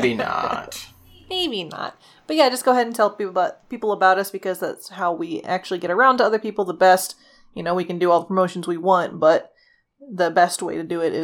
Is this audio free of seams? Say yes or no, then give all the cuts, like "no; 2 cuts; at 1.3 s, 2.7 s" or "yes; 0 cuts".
yes; 0 cuts